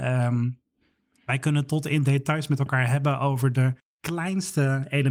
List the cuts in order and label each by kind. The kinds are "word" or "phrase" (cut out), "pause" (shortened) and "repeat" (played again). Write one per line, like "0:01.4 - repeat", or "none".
0:03.8 - pause